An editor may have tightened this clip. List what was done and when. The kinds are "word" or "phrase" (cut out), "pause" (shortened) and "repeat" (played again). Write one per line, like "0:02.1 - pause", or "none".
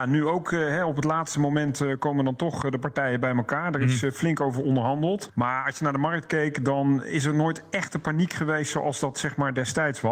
none